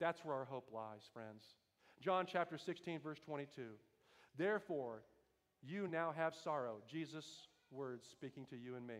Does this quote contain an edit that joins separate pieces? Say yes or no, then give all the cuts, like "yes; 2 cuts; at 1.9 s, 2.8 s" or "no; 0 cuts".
no; 0 cuts